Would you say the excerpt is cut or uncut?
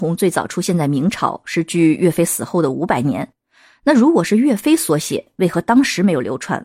uncut